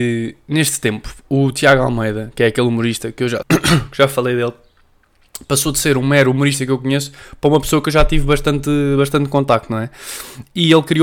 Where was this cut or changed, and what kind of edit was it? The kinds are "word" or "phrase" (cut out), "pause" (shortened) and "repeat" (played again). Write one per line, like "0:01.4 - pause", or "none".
0:03.4 - word